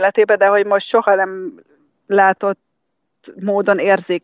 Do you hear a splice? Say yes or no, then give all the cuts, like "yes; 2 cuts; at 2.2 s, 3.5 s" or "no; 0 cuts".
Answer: no; 0 cuts